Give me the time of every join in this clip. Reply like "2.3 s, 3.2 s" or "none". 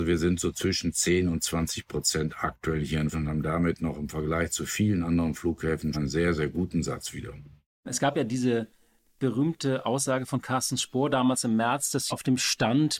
3.1 s, 5.9 s, 12.1 s